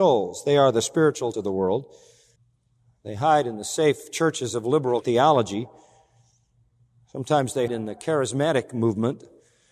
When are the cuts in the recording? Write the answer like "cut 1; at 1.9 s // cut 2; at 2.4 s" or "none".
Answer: cut 1; at 1.3 s // cut 2; at 2.4 s // cut 3; at 5.0 s // cut 4; at 7.7 s